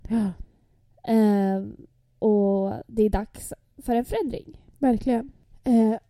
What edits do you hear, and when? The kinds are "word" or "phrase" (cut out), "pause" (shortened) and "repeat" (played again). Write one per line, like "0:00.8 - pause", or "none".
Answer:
none